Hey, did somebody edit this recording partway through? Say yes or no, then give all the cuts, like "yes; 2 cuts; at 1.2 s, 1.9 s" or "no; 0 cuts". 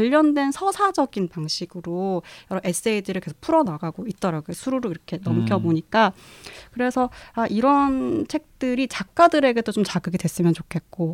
no; 0 cuts